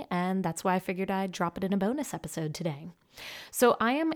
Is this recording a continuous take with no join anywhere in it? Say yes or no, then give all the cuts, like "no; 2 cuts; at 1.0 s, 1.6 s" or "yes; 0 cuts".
yes; 0 cuts